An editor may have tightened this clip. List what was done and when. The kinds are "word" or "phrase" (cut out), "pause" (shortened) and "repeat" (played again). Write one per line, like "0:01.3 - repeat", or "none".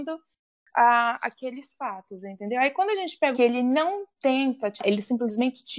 0:03.3 - phrase
0:04.1 - pause
0:04.8 - word